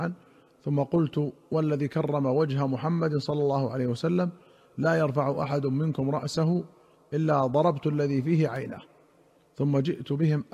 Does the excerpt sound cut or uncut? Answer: uncut